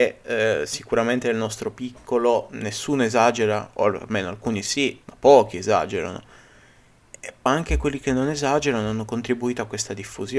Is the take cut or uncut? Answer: cut